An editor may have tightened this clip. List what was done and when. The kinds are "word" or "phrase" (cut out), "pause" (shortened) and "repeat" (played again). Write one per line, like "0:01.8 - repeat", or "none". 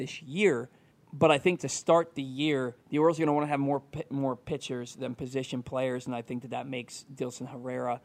0:00.9 - pause
0:02.8 - pause